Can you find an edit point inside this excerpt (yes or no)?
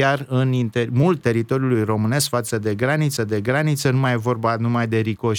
yes